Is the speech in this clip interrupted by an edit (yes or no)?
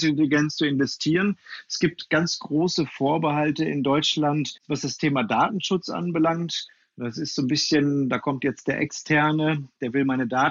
yes